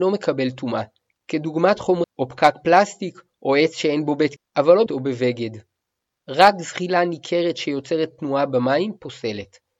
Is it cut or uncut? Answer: cut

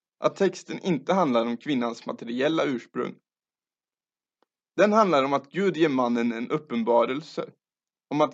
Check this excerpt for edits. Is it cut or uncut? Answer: uncut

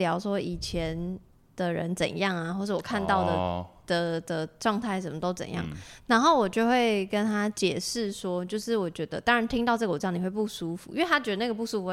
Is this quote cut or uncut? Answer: uncut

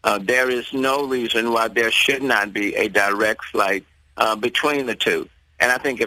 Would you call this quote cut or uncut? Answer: uncut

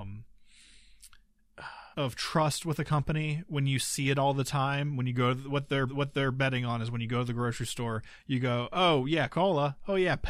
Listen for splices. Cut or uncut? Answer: cut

